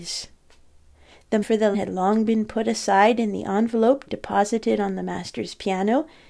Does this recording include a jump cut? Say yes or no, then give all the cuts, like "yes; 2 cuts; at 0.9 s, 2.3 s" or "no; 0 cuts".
yes; 3 cuts; at 1.4 s, 1.7 s, 4.1 s